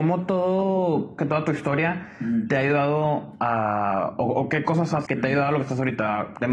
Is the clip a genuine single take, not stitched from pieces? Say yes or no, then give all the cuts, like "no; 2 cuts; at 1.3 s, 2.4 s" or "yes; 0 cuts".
no; 2 cuts; at 1.2 s, 5.1 s